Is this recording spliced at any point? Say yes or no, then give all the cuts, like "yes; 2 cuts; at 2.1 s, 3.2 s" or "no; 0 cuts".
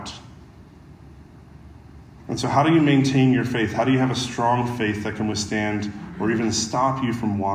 no; 0 cuts